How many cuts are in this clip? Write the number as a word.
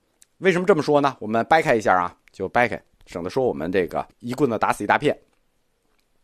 one